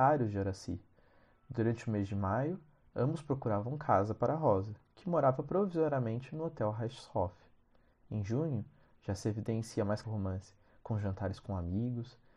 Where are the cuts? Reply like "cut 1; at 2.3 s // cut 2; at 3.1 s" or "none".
cut 1; at 10.0 s